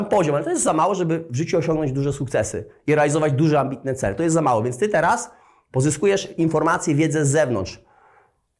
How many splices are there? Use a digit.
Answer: 0